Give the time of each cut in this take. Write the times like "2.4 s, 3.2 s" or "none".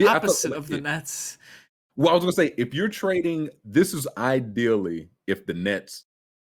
none